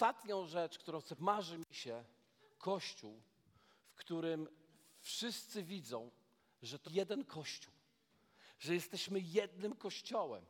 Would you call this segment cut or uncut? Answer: cut